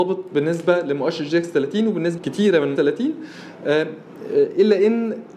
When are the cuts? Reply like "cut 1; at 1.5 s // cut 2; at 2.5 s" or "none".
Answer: cut 1; at 2.2 s // cut 2; at 2.8 s